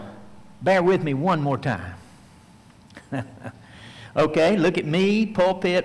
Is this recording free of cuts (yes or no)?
yes